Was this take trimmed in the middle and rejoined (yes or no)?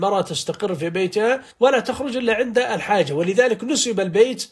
yes